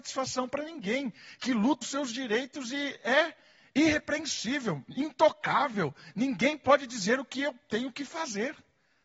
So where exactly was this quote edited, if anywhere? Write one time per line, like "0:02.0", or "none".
0:01.8